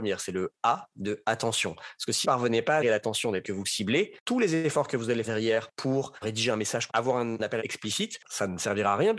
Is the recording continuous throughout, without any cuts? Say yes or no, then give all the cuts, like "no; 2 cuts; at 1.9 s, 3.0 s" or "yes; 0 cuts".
no; 6 cuts; at 2.2 s, 2.8 s, 3.4 s, 5.2 s, 6.9 s, 7.6 s